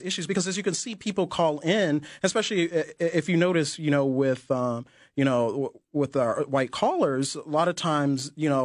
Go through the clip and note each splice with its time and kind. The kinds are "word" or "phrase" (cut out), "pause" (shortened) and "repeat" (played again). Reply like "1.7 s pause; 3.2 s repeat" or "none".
none